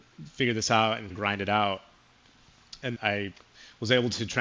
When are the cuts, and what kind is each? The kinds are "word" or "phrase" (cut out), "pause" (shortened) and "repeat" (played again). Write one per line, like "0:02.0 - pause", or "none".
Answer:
0:01.1 - word
0:02.9 - word